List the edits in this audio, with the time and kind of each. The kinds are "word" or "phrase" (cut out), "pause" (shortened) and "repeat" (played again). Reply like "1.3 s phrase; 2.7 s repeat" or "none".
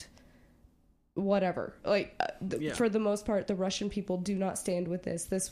none